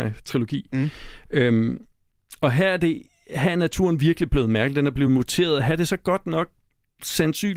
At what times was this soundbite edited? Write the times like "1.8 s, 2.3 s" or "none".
none